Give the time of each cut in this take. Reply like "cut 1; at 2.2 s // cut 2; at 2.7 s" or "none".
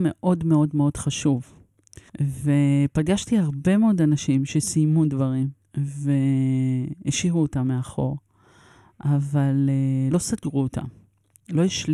cut 1; at 2.1 s // cut 2; at 5.6 s // cut 3; at 10.1 s